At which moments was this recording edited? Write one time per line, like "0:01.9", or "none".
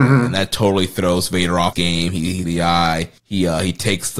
0:01.7
0:02.4
0:03.2